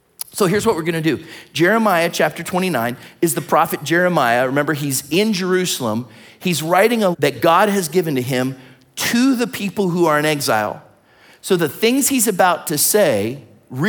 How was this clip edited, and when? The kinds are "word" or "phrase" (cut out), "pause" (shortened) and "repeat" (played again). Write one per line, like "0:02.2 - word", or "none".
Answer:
0:07.1 - word